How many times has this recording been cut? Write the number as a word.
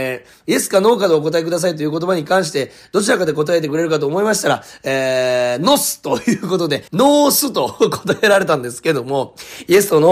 one